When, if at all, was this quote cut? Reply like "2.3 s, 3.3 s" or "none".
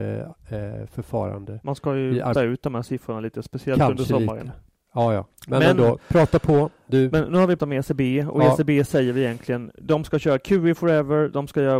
2.4 s, 7.6 s